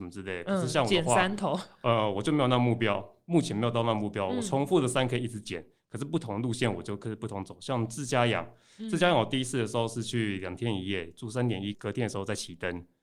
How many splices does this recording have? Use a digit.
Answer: 1